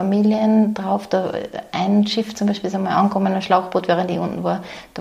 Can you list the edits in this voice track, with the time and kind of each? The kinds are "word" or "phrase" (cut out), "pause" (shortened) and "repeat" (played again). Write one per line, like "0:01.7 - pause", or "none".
none